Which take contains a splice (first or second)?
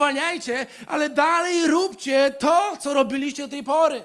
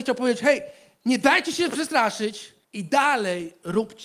second